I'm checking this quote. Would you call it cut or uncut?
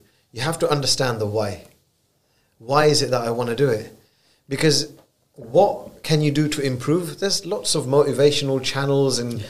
uncut